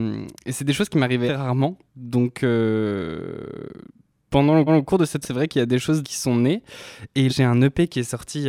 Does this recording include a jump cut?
yes; 6 cuts; at 1.3 s, 1.9 s, 4.7 s, 5.2 s, 6.0 s, 7.3 s

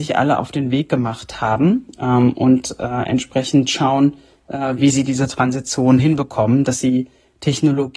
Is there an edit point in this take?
no; 0 cuts

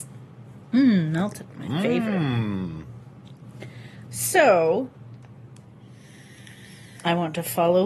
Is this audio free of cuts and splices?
no; 2 cuts; at 1.5 s, 4.1 s

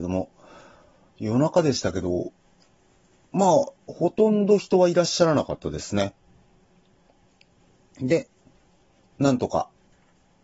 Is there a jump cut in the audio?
no; 0 cuts

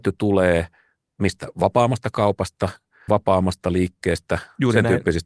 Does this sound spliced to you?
yes; 1 cut; at 3.1 s

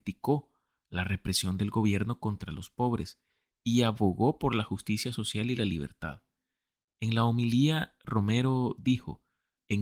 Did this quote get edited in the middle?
no; 0 cuts

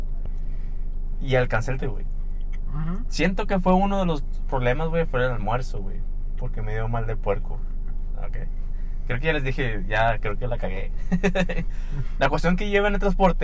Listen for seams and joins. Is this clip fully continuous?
no; 1 cut; at 1.8 s

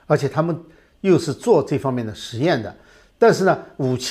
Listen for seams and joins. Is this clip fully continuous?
yes; 0 cuts

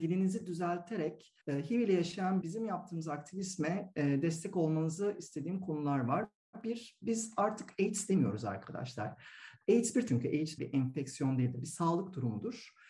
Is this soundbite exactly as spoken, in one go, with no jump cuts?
no; 4 cuts; at 1.4 s, 2.4 s, 10.1 s, 10.6 s

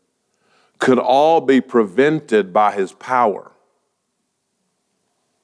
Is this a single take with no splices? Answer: yes; 0 cuts

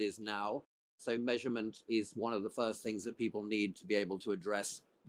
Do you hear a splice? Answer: no; 0 cuts

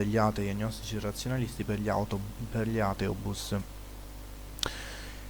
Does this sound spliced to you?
no; 0 cuts

